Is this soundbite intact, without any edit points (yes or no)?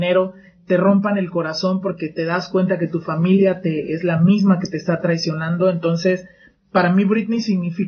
yes